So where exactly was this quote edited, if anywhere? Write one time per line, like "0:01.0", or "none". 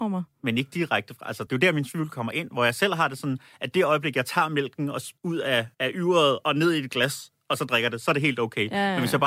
0:05.2
0:05.7